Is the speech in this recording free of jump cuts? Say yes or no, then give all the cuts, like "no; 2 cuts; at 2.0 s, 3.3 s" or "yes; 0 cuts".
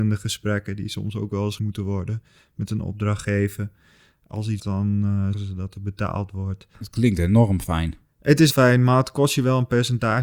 no; 4 cuts; at 1.6 s, 4.6 s, 5.3 s, 8.5 s